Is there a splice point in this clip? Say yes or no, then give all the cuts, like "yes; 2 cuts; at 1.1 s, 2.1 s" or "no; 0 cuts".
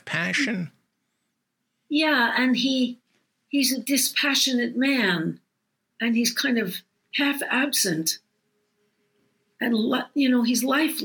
no; 0 cuts